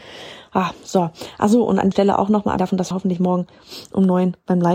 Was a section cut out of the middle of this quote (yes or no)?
yes